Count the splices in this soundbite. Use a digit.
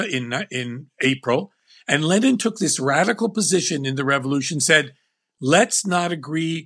0